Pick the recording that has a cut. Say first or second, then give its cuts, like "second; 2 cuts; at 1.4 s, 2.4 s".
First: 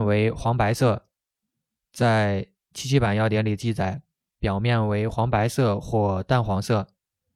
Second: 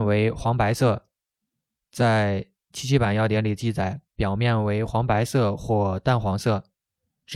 second; 1 cut; at 4.1 s